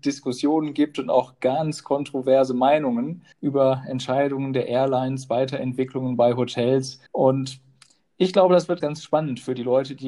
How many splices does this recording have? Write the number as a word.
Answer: three